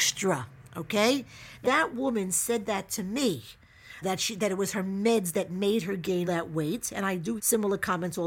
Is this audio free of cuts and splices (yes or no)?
no